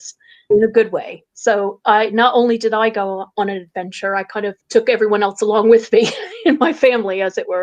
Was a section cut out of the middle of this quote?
yes; 1 cut; at 4.6 s

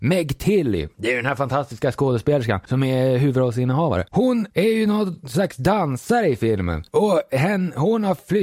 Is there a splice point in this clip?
no; 0 cuts

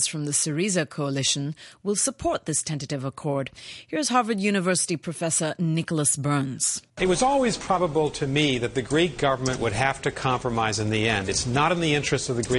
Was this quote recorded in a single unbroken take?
no; 1 cut; at 6.9 s

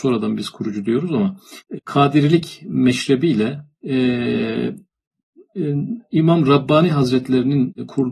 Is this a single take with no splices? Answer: yes; 0 cuts

